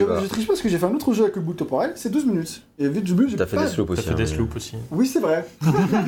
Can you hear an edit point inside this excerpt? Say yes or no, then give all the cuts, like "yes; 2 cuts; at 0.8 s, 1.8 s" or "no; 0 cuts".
no; 0 cuts